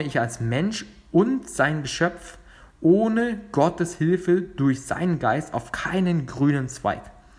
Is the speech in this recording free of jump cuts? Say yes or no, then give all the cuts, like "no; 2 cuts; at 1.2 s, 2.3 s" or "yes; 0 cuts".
yes; 0 cuts